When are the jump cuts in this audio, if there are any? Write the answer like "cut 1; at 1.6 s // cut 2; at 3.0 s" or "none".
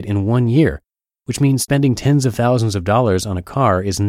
none

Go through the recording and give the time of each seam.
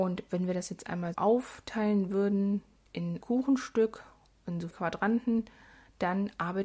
cut 1; at 1.1 s // cut 2; at 3.2 s // cut 3; at 4.7 s

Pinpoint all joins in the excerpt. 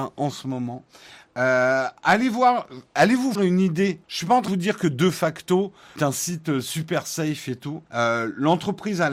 cut 1; at 2.0 s // cut 2; at 3.4 s // cut 3; at 4.0 s // cut 4; at 4.5 s // cut 5; at 6.0 s // cut 6; at 7.9 s

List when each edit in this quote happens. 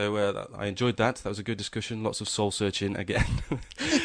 none

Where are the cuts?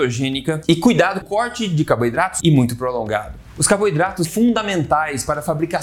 cut 1; at 1.2 s // cut 2; at 2.4 s // cut 3; at 4.2 s

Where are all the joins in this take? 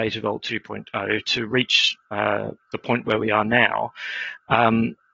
none

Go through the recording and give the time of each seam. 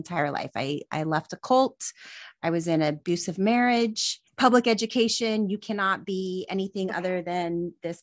cut 1; at 4.3 s

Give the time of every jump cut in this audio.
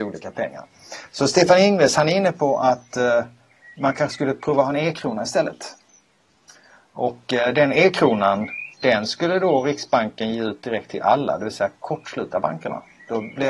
cut 1; at 8.7 s

